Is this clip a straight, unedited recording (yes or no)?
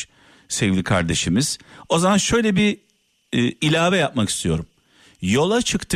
yes